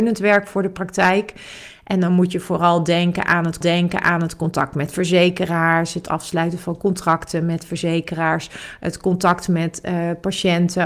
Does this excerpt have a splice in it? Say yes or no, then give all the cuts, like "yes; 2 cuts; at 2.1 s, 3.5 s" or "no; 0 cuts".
yes; 1 cut; at 3.6 s